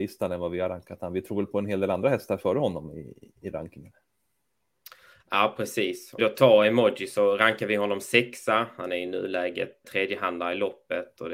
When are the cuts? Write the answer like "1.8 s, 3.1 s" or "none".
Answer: 6.2 s, 9.8 s